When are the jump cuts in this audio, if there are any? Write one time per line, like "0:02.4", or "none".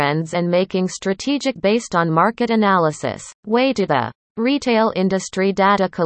0:01.6
0:03.4
0:03.9